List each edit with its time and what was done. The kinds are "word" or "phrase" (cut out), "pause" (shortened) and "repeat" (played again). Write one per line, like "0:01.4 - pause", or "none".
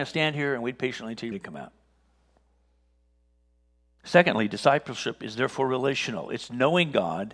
0:01.3 - word